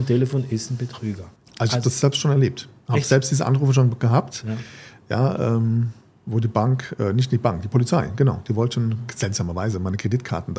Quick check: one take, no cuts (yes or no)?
no